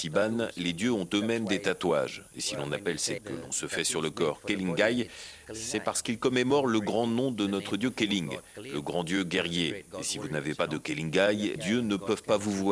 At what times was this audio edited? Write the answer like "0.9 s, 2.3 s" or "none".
3.2 s, 11.6 s